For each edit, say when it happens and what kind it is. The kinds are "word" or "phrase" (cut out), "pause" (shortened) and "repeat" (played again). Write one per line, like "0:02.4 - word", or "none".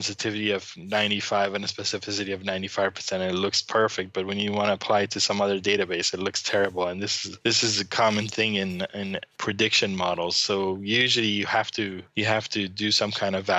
none